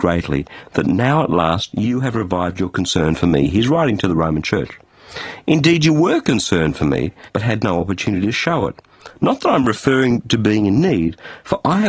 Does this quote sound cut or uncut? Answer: cut